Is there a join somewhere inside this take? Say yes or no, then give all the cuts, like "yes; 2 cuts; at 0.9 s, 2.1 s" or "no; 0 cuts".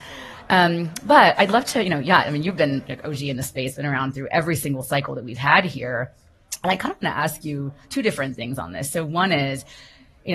yes; 1 cut; at 7.8 s